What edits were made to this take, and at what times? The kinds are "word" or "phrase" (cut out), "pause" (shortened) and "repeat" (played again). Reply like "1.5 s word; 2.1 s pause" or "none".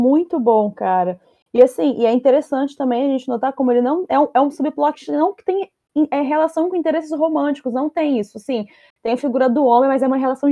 none